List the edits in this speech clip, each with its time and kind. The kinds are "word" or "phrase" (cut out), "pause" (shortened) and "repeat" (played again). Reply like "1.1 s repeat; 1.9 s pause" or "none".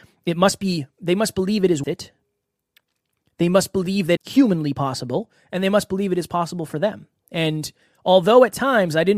1.8 s word; 4.2 s phrase